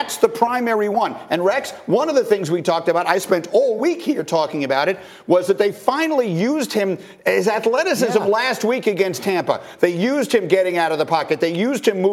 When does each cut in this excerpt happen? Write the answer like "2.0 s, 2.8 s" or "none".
none

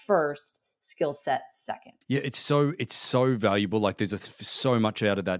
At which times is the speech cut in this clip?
2.0 s

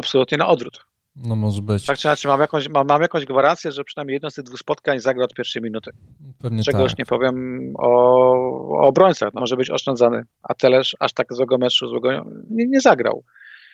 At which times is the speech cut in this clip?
9.4 s, 12.5 s

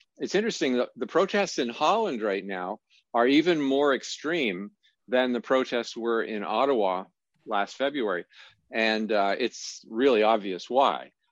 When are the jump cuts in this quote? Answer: none

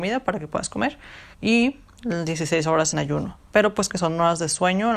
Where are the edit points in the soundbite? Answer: 1.3 s, 2.9 s, 3.9 s

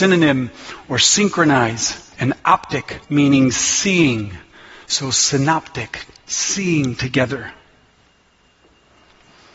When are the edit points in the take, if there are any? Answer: 2.1 s, 3.0 s

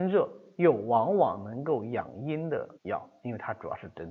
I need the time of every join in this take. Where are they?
2.7 s

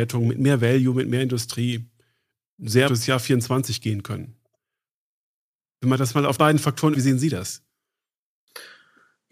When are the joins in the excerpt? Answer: 2.9 s, 6.4 s, 6.9 s

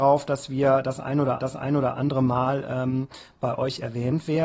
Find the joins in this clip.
1.4 s

